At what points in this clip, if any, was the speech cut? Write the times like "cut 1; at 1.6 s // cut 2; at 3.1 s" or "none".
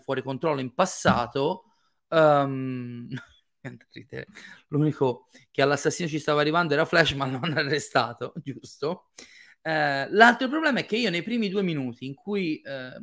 none